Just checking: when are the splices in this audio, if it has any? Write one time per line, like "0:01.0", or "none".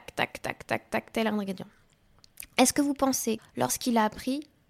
0:03.4